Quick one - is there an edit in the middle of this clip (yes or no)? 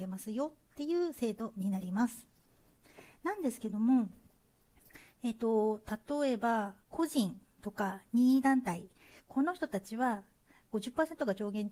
no